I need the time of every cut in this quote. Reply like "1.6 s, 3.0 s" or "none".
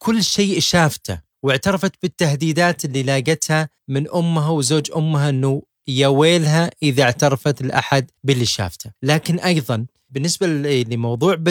1.3 s, 8.2 s, 9.0 s